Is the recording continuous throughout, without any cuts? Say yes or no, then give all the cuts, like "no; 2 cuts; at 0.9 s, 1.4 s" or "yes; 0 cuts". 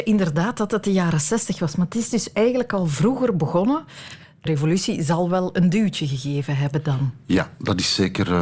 no; 1 cut; at 4.5 s